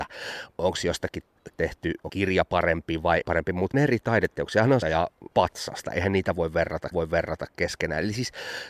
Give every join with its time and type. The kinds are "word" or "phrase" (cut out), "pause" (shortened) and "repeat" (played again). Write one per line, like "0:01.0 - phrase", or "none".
0:01.5 - word
0:02.1 - word
0:03.2 - word
0:03.7 - phrase
0:04.8 - phrase
0:05.3 - pause
0:06.9 - repeat